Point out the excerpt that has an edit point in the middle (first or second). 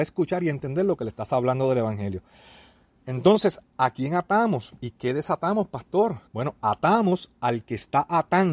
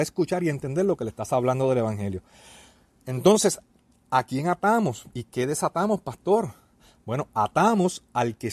first